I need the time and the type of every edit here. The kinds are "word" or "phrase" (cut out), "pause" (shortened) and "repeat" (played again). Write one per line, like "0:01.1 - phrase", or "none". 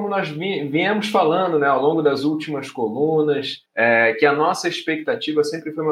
0:03.7 - pause